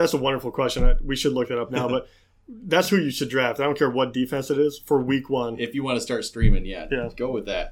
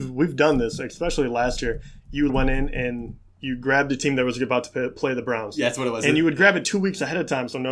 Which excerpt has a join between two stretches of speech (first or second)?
second